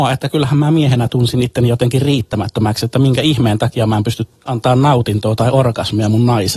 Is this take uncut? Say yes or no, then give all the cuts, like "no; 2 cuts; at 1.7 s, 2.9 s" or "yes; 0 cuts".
no; 1 cut; at 4.4 s